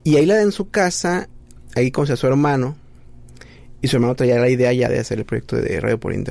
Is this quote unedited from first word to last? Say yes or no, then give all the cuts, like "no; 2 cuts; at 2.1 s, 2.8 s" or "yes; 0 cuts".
yes; 0 cuts